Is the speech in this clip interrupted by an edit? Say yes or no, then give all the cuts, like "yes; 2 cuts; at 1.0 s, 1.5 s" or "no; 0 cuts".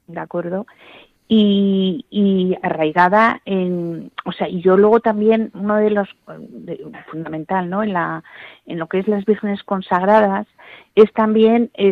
no; 0 cuts